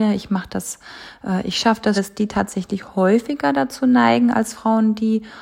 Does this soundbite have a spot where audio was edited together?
yes; 1 cut; at 1.9 s

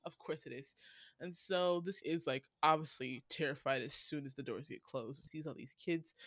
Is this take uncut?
no; 2 cuts; at 2.0 s, 5.3 s

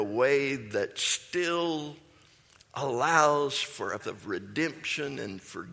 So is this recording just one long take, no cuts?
no; 1 cut; at 4.0 s

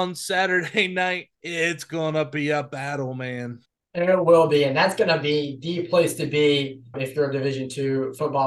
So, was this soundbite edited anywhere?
yes; 3 cuts; at 1.3 s, 3.7 s, 6.9 s

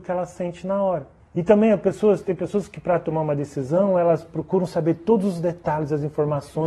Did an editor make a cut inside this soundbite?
yes; 1 cut; at 1.2 s

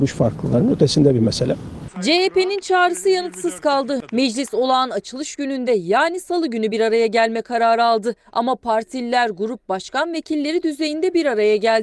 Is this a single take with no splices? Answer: yes; 0 cuts

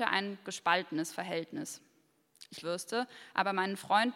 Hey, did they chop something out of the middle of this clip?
yes; 1 cut; at 2.6 s

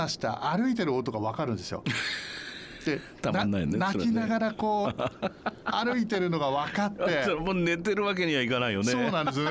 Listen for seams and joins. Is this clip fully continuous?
yes; 0 cuts

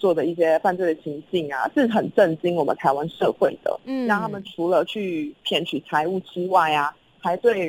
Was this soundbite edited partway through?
yes; 1 cut; at 1.7 s

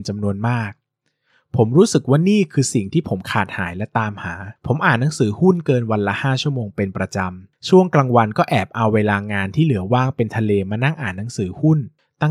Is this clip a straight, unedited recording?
no; 1 cut; at 4.6 s

